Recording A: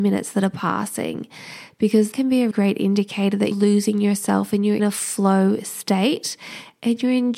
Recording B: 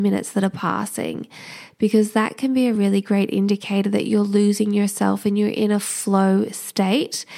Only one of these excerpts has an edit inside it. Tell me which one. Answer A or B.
A